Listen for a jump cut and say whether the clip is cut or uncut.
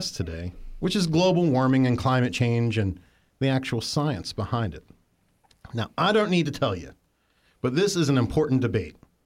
uncut